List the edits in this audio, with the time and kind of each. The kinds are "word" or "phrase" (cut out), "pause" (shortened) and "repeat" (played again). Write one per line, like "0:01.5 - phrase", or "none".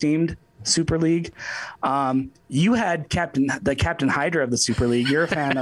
0:02.4 - pause